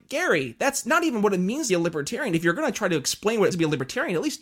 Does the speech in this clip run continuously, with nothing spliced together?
no; 2 cuts; at 1.7 s, 3.5 s

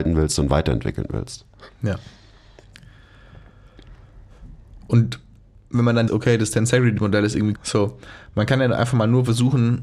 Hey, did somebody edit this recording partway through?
yes; 2 cuts; at 6.1 s, 7.6 s

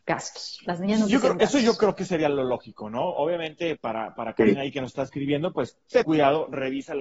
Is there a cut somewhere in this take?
yes; 2 cuts; at 3.8 s, 6.0 s

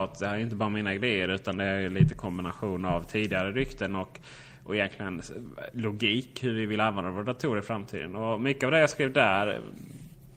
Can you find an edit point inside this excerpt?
no; 0 cuts

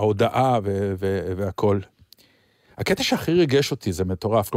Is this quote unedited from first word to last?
yes; 0 cuts

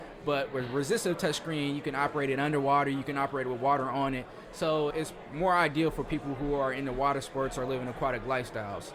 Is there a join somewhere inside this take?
yes; 1 cut; at 4.9 s

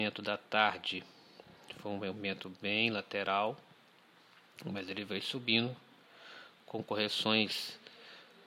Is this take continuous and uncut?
yes; 0 cuts

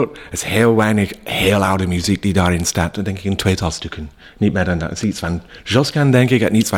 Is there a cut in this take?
no; 0 cuts

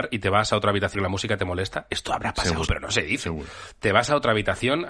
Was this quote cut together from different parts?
yes; 2 cuts; at 0.9 s, 2.7 s

